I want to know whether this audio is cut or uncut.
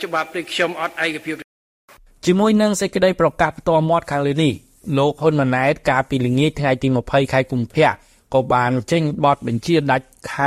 uncut